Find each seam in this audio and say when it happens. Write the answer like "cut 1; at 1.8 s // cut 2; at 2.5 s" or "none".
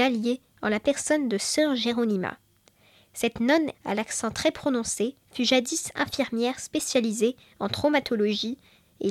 cut 1; at 3.7 s // cut 2; at 5.2 s